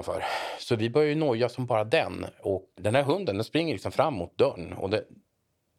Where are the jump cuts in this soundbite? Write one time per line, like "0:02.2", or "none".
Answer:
0:02.8